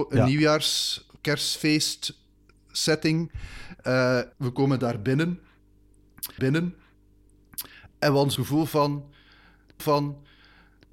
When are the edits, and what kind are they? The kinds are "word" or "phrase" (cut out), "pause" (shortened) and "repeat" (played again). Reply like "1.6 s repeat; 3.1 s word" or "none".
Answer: 4.3 s pause; 6.4 s repeat; 8.4 s word; 9.8 s repeat